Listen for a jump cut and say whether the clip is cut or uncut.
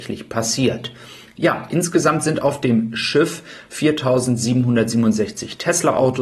uncut